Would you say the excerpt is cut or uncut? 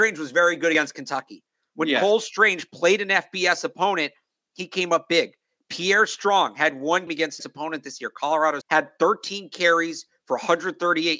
cut